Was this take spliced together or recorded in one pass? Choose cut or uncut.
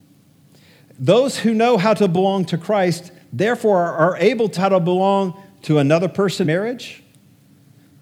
cut